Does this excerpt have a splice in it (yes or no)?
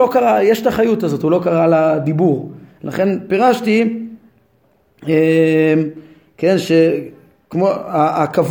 no